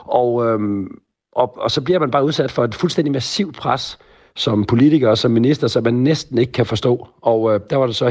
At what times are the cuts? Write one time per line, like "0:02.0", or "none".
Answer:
none